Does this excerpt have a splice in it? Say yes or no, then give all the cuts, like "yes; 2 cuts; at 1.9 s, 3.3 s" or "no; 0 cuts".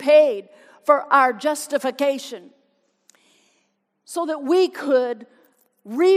no; 0 cuts